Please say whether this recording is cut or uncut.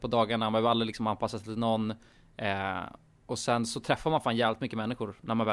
uncut